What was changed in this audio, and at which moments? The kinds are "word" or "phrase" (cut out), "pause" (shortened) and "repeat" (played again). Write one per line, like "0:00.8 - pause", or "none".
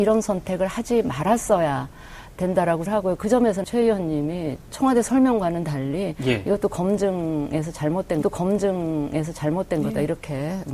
0:02.9 - word
0:03.6 - phrase
0:08.2 - repeat